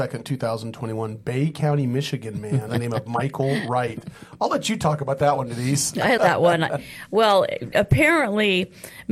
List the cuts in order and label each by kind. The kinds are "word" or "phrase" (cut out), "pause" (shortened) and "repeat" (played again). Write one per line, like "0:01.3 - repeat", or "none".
0:02.7 - word
0:06.2 - word